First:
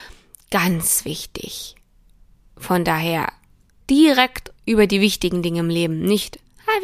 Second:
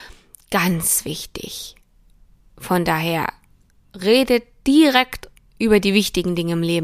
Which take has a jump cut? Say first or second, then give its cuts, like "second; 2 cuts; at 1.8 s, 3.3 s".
first; 2 cuts; at 3.8 s, 4.6 s